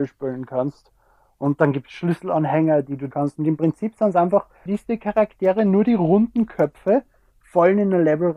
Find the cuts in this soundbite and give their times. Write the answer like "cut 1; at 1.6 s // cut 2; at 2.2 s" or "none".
cut 1; at 3.1 s // cut 2; at 4.7 s